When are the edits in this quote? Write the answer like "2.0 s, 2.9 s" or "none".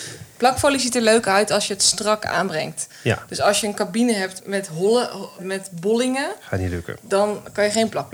4.4 s, 5.4 s

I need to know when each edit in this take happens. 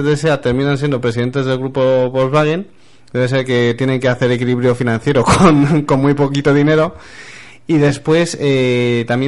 none

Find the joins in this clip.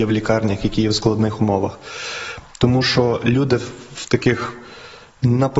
none

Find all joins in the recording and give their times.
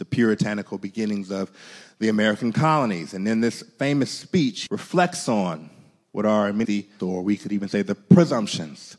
4.7 s, 6.6 s, 7.0 s

